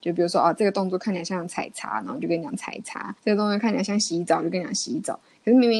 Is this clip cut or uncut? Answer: cut